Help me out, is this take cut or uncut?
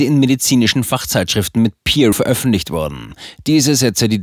cut